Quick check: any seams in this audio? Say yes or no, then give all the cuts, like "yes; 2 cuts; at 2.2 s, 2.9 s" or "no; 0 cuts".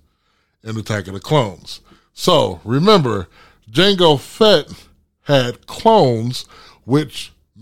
no; 0 cuts